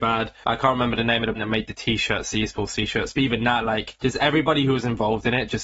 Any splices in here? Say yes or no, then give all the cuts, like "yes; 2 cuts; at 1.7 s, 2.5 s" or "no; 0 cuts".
yes; 1 cut; at 1.3 s